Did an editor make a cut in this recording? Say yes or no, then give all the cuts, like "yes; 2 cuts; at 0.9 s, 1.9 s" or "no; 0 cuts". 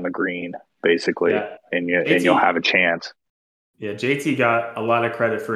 no; 0 cuts